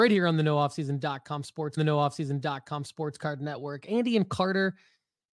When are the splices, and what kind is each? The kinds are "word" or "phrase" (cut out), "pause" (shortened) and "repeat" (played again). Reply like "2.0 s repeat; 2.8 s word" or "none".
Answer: 1.8 s repeat